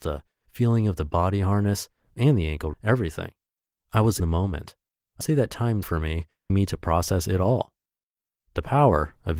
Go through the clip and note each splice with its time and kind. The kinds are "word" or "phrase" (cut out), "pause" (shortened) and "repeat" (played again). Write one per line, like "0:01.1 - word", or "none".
0:02.7 - word
0:04.2 - word
0:05.2 - word
0:05.8 - word
0:06.5 - word